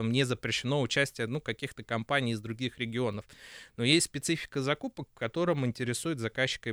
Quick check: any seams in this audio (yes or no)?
no